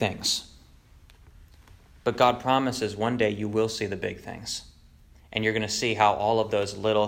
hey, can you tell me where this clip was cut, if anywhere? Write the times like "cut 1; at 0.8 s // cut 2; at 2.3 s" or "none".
none